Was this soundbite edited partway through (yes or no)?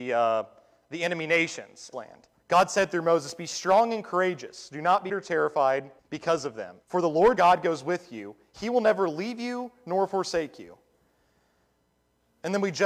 yes